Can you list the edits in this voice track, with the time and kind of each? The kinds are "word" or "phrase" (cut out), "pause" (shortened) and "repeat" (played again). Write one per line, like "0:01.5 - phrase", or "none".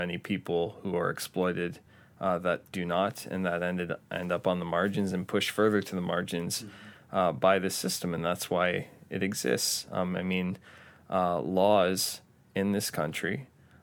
none

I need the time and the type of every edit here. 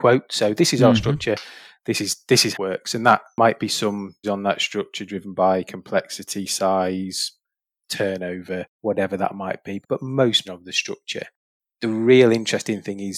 0:02.5 - phrase
0:04.2 - word
0:08.7 - pause
0:09.8 - word
0:10.4 - phrase

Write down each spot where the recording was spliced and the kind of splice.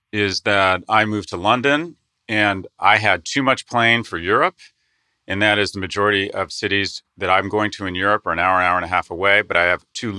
none

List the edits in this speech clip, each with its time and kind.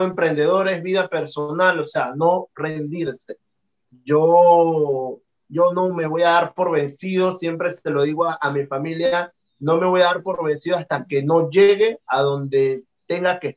none

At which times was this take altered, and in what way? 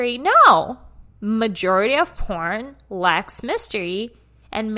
none

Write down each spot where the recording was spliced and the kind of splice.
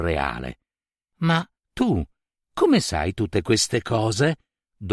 0:01.6 - pause

